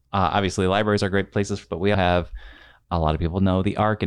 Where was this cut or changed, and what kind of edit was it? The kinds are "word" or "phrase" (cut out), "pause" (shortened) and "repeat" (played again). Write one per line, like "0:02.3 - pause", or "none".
0:01.6 - word
0:01.9 - word